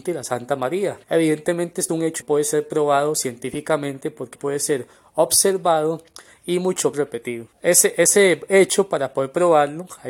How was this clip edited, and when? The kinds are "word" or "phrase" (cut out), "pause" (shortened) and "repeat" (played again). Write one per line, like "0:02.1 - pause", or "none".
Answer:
0:01.0 - pause
0:01.9 - word
0:02.2 - phrase
0:04.3 - word
0:06.9 - word
0:07.5 - pause